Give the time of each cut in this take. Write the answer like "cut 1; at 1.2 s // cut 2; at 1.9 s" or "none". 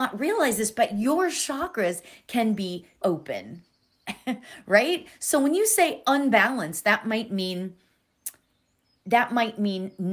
cut 1; at 3.0 s